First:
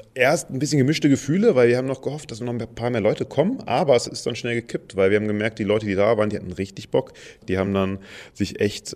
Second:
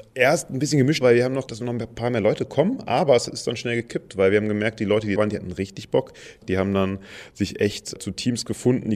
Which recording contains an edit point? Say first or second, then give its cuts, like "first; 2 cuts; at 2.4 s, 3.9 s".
second; 3 cuts; at 1.0 s, 1.5 s, 5.2 s